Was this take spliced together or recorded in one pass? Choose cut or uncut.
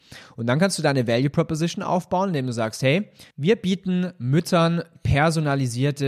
cut